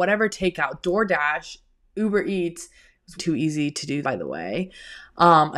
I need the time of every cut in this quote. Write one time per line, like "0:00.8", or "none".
0:03.2
0:04.0